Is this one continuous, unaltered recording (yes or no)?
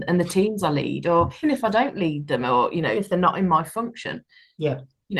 no